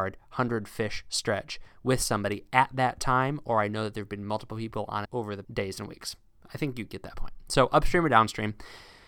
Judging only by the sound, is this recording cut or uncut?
cut